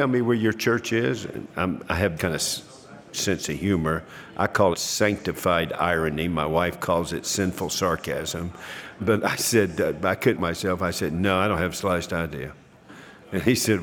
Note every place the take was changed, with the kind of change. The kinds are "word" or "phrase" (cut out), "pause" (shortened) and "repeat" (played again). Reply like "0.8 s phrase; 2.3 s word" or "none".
2.2 s word; 3.1 s word; 4.7 s word; 10.4 s word